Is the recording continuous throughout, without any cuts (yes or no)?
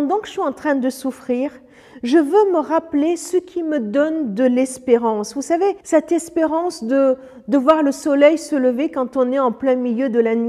no